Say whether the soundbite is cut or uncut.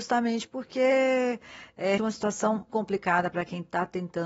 cut